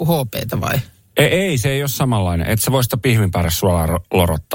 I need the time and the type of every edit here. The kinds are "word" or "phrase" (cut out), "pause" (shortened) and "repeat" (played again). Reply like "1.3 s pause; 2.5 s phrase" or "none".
none